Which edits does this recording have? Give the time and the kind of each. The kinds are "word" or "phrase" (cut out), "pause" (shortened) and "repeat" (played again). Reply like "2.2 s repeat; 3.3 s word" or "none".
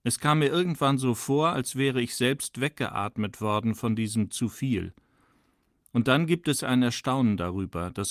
none